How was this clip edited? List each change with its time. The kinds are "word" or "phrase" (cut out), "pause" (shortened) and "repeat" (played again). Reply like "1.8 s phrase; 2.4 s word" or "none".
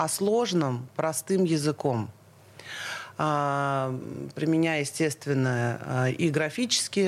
none